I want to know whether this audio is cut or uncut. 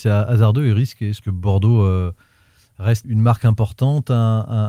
cut